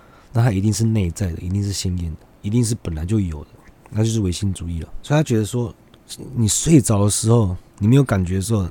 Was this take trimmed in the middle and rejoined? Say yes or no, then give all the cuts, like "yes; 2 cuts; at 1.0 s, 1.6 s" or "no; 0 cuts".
no; 0 cuts